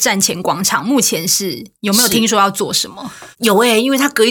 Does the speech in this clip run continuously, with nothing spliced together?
no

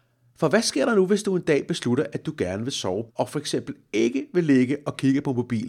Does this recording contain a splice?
yes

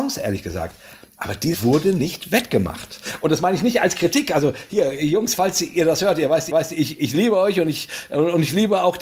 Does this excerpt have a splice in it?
yes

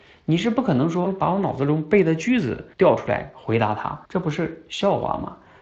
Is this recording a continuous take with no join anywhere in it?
no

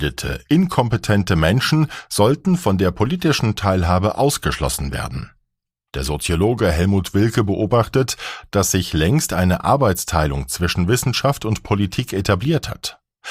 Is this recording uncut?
yes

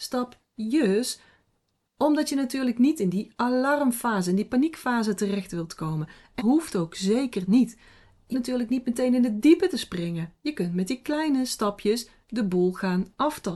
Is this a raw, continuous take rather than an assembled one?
no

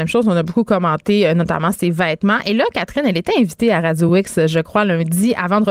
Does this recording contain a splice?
no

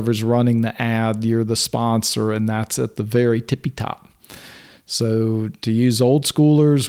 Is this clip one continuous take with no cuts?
yes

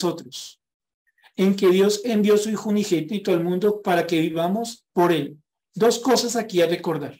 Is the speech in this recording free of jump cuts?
yes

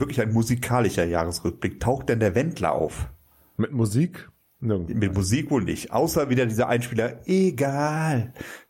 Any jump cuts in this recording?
no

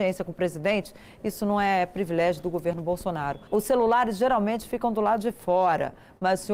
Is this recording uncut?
no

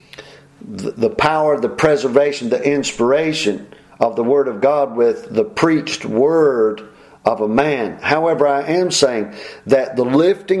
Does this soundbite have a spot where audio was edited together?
no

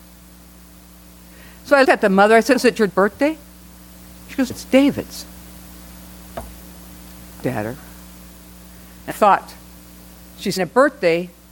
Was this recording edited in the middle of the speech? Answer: yes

